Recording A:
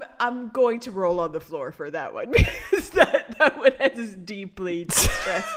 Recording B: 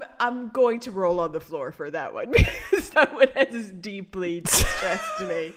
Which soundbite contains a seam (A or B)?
B